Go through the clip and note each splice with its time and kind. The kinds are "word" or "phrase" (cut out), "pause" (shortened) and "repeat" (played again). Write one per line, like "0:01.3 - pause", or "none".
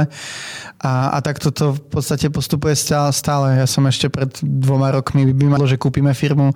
0:05.6 - word